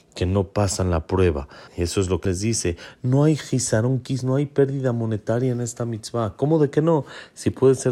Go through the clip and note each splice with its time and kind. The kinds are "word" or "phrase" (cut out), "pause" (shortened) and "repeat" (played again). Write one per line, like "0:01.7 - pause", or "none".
0:01.7 - pause
0:02.2 - word